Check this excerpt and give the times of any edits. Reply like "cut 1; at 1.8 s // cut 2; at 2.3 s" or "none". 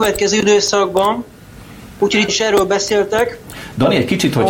cut 1; at 2.3 s